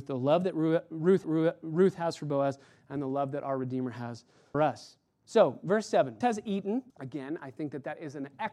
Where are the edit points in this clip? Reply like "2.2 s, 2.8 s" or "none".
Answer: 1.2 s, 4.5 s, 6.2 s, 6.9 s